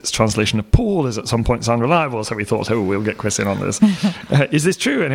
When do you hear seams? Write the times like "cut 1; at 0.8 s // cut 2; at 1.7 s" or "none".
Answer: none